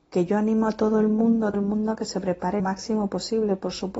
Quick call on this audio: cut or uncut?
cut